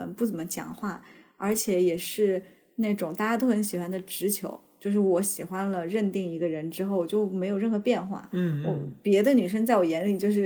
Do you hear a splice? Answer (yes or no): no